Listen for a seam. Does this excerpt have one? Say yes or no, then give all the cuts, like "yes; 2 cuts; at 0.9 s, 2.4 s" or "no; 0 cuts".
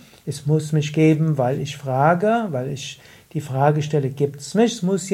no; 0 cuts